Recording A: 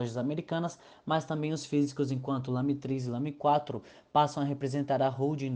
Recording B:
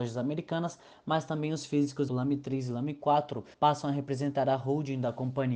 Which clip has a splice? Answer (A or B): B